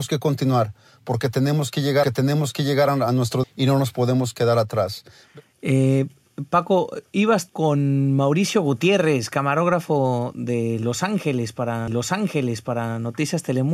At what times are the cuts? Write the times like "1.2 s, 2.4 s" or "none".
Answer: 2.0 s, 3.4 s, 7.5 s, 11.9 s